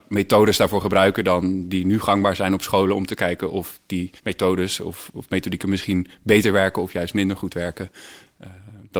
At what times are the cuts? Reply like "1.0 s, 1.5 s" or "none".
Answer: 4.2 s